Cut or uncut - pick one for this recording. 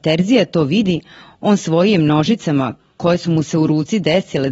uncut